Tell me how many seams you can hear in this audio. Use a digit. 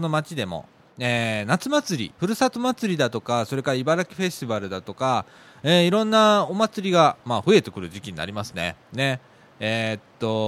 2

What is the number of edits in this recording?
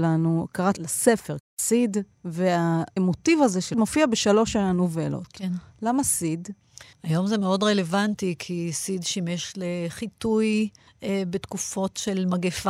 3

